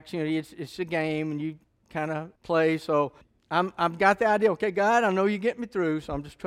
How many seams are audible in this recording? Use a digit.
3